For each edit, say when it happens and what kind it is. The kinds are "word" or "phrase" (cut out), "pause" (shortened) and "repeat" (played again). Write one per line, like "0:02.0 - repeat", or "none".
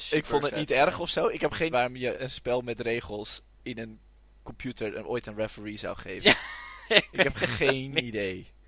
0:01.7 - word
0:02.1 - word